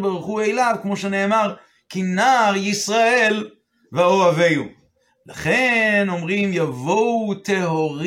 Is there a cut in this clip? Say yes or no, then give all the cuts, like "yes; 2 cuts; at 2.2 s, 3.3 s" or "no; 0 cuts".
no; 0 cuts